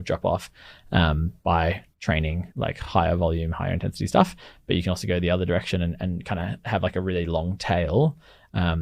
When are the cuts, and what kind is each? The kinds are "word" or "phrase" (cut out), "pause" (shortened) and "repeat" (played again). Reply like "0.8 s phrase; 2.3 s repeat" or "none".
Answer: 2.5 s pause